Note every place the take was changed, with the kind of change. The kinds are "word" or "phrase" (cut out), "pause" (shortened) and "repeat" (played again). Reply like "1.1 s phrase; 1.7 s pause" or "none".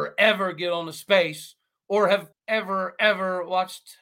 2.3 s word